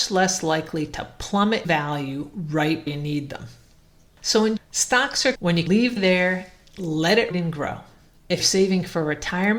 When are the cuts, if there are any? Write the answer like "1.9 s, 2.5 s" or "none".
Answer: 1.6 s, 2.9 s, 4.6 s, 5.3 s, 5.7 s, 6.0 s, 7.3 s, 8.4 s

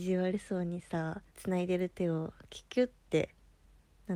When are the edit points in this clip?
1.3 s

